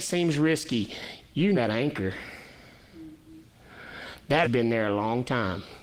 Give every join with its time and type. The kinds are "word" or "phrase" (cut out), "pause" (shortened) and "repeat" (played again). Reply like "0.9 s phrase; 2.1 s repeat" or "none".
1.5 s word; 4.4 s word